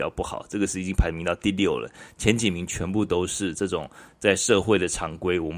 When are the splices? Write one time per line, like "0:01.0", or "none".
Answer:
none